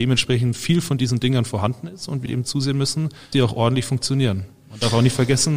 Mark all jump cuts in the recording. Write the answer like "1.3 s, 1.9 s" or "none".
2.3 s, 3.3 s